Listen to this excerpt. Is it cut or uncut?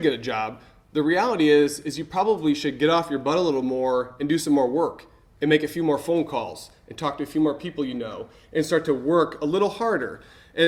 uncut